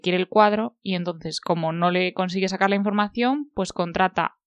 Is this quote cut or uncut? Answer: uncut